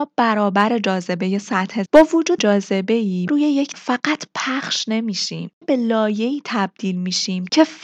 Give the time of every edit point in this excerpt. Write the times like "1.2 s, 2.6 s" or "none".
1.9 s, 2.4 s, 3.3 s, 3.7 s, 5.6 s